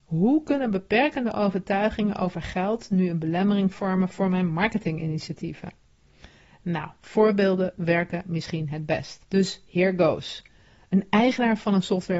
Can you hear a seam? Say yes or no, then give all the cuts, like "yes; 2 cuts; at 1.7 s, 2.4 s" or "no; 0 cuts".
yes; 1 cut; at 9.3 s